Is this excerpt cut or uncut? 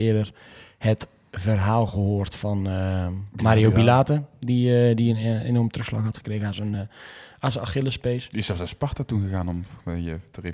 uncut